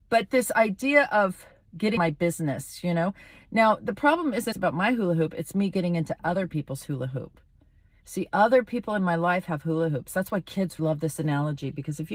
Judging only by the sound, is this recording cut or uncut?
cut